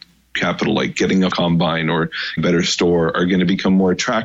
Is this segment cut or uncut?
cut